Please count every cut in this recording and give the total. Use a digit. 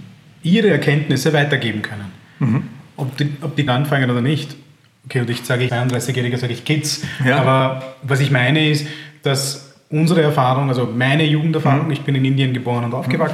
3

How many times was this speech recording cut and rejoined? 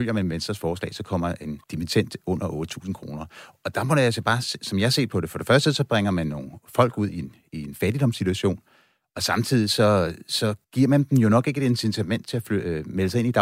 2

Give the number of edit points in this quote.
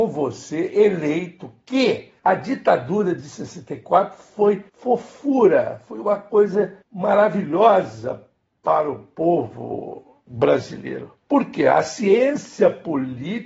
4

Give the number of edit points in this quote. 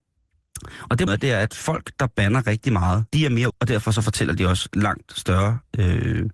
3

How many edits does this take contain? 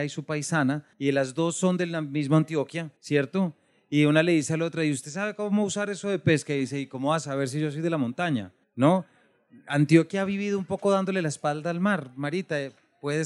3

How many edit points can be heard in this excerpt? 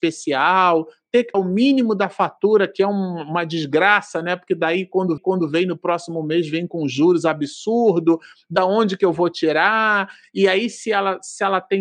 2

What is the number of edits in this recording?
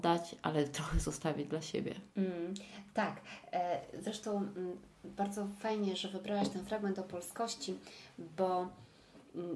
1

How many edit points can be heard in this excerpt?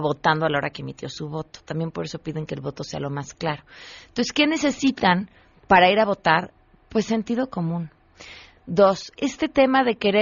1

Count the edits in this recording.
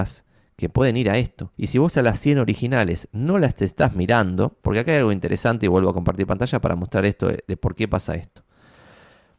2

